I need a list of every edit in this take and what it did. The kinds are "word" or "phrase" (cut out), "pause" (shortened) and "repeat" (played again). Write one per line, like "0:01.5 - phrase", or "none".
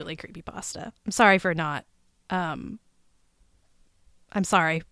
0:01.0 - pause